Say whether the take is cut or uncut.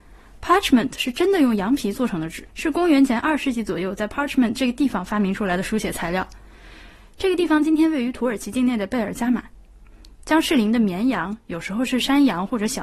cut